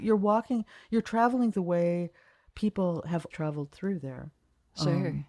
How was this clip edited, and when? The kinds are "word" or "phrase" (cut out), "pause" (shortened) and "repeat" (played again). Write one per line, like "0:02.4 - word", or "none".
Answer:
0:01.5 - word
0:03.3 - word